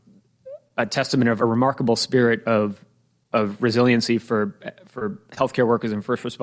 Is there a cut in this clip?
yes; 1 cut; at 1.4 s

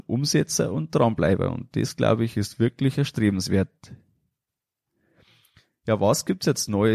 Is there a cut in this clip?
no; 0 cuts

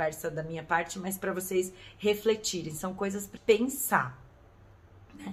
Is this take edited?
yes; 1 cut; at 3.4 s

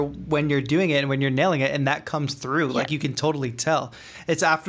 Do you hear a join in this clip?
no; 0 cuts

